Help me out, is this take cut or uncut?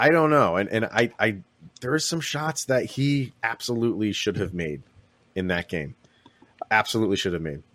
cut